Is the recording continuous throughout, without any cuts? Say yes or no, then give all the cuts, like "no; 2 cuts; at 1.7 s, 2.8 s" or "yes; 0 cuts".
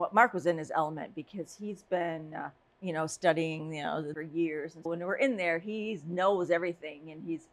no; 3 cuts; at 2.6 s, 4.1 s, 4.9 s